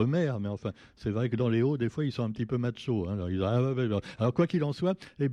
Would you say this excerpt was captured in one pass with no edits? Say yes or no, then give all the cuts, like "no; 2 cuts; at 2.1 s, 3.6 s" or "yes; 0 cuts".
yes; 0 cuts